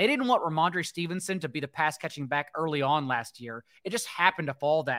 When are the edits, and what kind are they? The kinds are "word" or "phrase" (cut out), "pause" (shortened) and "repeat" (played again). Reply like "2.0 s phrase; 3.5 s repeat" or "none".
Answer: none